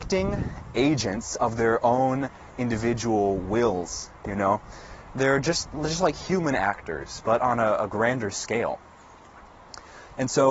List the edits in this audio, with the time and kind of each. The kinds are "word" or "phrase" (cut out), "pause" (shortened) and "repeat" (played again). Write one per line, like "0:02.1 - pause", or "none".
none